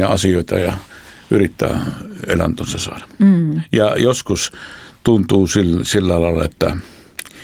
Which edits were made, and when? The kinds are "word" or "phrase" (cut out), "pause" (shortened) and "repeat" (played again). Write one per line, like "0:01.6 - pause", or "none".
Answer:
none